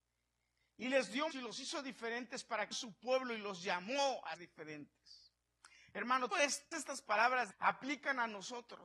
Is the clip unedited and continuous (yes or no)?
no